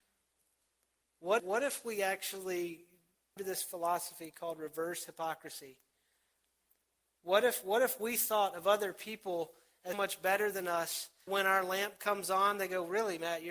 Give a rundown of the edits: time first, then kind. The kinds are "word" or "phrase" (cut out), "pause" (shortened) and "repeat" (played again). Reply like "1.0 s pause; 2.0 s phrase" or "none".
1.4 s word; 3.4 s word; 9.9 s word; 11.3 s word